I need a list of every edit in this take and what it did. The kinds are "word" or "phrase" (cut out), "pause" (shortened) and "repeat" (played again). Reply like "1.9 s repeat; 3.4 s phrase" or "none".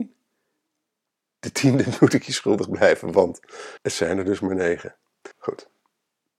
3.8 s pause; 5.3 s pause